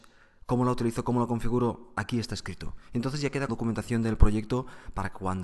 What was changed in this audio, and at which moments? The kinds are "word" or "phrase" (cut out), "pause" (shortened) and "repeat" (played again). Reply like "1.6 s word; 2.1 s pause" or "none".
3.5 s word